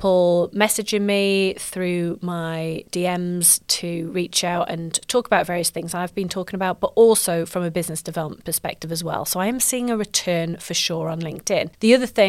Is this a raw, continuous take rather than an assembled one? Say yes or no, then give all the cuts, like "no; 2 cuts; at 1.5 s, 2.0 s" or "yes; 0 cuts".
yes; 0 cuts